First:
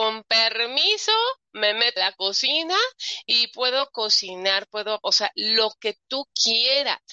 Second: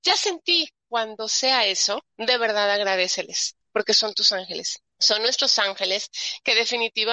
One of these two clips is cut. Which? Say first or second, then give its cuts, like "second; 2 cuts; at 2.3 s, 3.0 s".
first; 2 cuts; at 2.0 s, 5.0 s